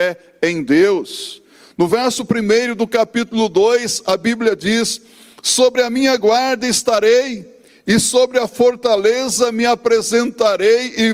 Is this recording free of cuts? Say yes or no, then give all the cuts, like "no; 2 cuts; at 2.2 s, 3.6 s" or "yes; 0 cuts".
yes; 0 cuts